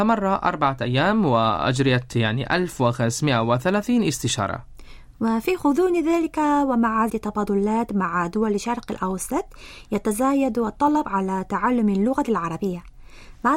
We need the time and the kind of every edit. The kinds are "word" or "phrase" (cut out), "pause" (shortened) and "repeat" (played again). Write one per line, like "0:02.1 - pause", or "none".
0:07.1 - word

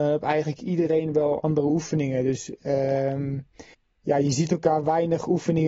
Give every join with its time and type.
0:03.7 - pause

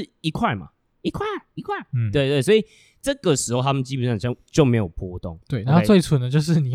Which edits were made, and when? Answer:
none

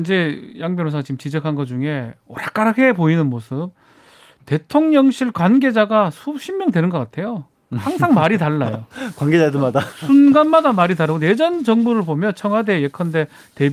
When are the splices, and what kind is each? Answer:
none

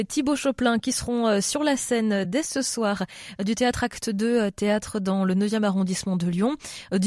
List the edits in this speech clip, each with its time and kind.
none

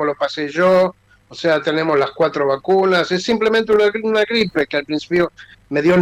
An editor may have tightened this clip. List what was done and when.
none

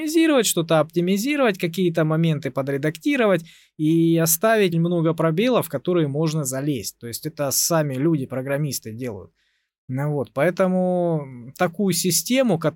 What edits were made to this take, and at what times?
0:04.7 - word

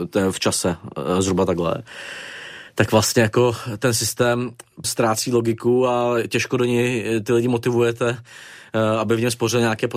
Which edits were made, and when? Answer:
0:04.8 - word

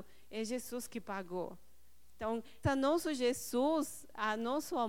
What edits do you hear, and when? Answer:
0:02.6 - word

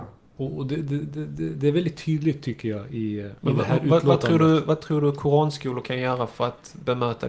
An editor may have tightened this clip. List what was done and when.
0:03.4 - pause

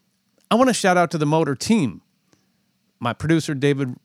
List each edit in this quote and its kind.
none

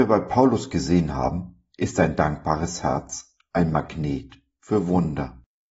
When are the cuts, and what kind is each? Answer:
none

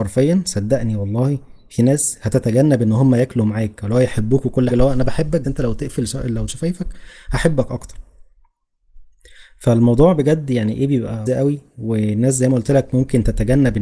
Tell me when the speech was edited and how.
0:04.7 - word
0:05.4 - word
0:06.5 - word
0:11.3 - word

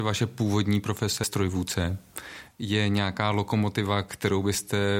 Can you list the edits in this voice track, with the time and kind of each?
0:01.2 - word

